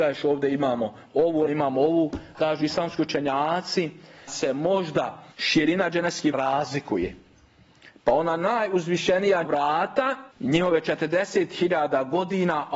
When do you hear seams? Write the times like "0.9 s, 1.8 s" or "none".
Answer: 1.5 s, 2.3 s, 4.3 s, 5.3 s, 6.3 s, 9.4 s, 10.3 s

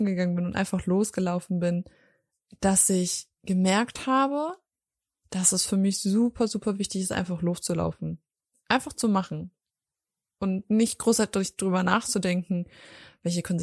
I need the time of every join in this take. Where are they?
none

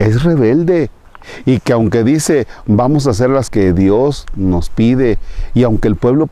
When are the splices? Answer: 3.5 s

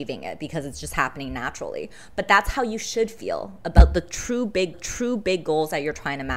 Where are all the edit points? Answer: 4.7 s

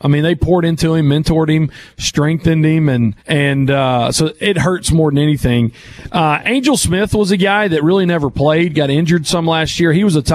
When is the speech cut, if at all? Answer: 3.2 s

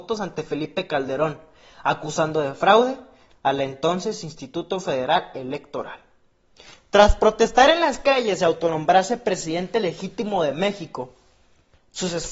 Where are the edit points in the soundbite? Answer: none

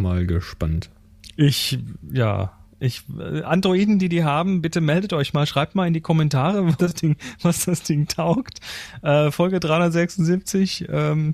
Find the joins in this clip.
3.4 s, 6.8 s

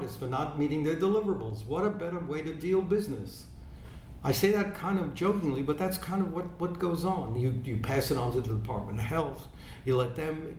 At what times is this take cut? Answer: none

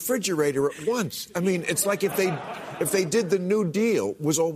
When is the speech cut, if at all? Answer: none

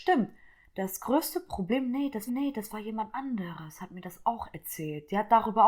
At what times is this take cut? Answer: 2.3 s

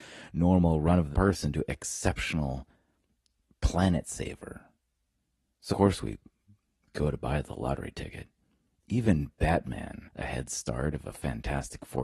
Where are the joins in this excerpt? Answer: 1.1 s, 5.7 s, 10.1 s

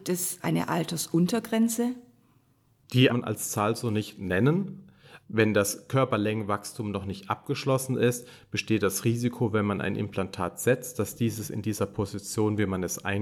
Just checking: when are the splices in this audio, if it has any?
3.1 s

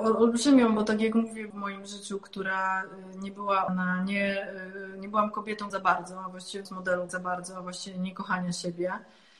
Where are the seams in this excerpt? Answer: 1.5 s, 3.7 s, 5.7 s, 6.7 s, 7.1 s

